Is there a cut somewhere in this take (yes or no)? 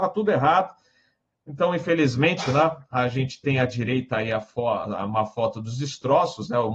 no